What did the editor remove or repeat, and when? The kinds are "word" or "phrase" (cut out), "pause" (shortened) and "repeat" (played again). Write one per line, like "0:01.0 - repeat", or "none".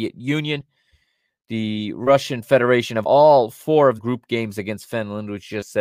0:03.0 - word
0:04.0 - word